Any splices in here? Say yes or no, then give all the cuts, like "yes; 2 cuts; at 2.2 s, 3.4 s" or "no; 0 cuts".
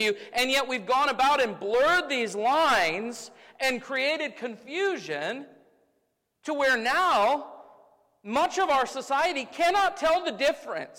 no; 0 cuts